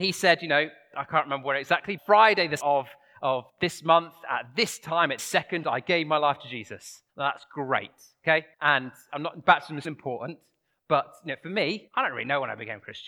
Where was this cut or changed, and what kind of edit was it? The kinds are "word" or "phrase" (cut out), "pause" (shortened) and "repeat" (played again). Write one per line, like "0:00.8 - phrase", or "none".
0:02.0 - phrase
0:02.6 - word
0:03.5 - pause
0:05.2 - word
0:07.1 - pause
0:08.5 - pause
0:09.8 - word
0:11.9 - pause